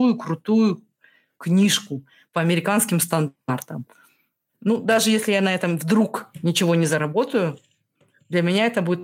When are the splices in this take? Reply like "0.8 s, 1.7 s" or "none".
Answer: none